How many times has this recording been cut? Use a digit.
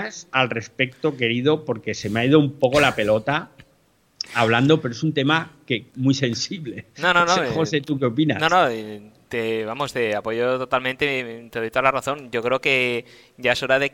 1